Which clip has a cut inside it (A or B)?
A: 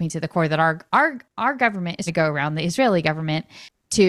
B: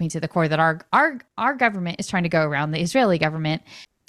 A